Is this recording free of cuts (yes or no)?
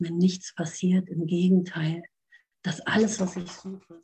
yes